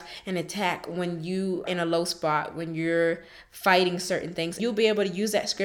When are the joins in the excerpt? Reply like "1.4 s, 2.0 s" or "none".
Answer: 1.7 s, 4.6 s